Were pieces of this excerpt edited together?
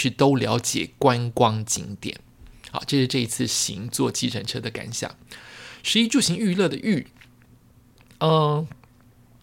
no; 0 cuts

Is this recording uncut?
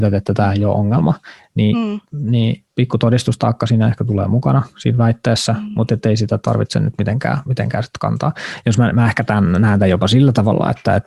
no; 1 cut; at 2.7 s

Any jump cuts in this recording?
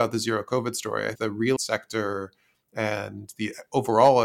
yes; 2 cuts; at 1.2 s, 1.6 s

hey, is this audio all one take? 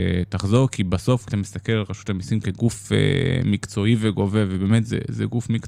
no; 1 cut; at 1.3 s

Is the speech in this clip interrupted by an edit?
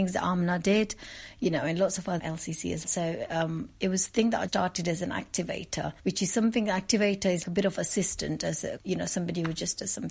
yes; 6 cuts; at 2.2 s, 2.8 s, 4.5 s, 6.0 s, 7.4 s, 8.8 s

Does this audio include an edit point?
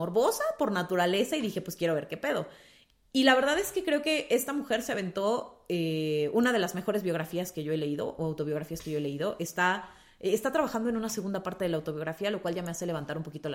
no; 0 cuts

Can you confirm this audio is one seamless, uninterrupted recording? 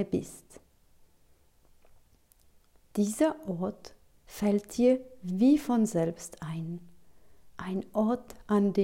yes; 0 cuts

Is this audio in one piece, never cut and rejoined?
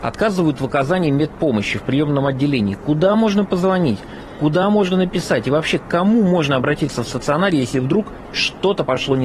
yes; 0 cuts

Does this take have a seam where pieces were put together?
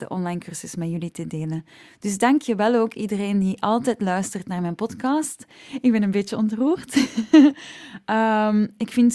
no; 0 cuts

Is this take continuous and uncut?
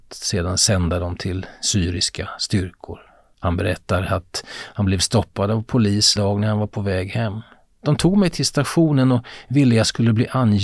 no; 1 cut; at 6.2 s

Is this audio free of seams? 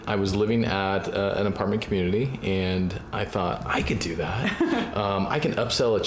yes; 0 cuts

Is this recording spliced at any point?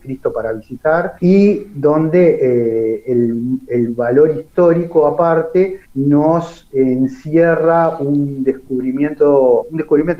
yes; 2 cuts; at 1.2 s, 5.8 s

